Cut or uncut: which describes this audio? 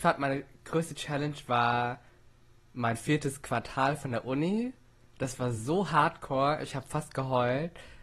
uncut